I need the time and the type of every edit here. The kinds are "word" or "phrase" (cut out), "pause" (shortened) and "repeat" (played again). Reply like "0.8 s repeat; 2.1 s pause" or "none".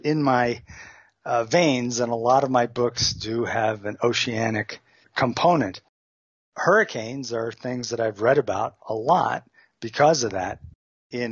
none